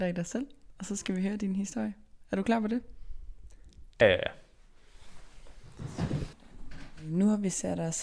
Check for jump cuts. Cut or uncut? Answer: cut